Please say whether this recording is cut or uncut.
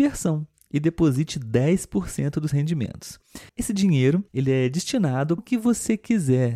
cut